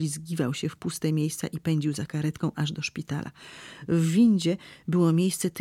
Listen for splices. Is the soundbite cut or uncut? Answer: uncut